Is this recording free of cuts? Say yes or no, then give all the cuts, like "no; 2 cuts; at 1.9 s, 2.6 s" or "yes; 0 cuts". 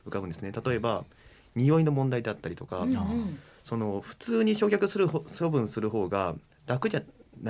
yes; 0 cuts